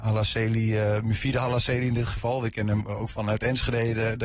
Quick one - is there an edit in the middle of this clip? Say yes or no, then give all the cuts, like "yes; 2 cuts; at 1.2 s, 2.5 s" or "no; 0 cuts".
no; 0 cuts